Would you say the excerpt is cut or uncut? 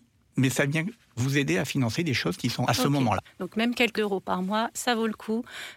cut